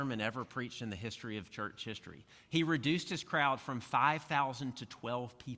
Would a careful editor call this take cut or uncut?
uncut